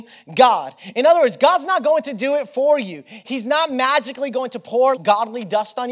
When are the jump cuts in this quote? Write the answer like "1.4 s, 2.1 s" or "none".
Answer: 5.0 s